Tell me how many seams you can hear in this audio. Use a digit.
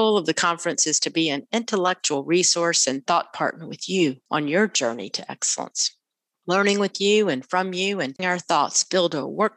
1